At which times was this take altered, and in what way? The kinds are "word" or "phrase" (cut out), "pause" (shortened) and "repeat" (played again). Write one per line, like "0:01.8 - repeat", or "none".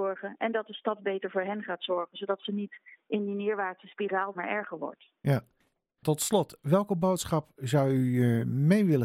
0:04.3 - phrase